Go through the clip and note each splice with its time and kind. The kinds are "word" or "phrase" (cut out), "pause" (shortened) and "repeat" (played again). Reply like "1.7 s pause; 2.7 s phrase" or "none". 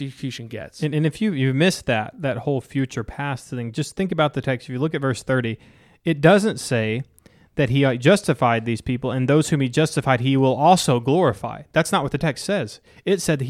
none